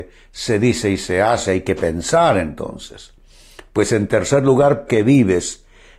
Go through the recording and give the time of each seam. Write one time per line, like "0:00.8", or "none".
0:04.9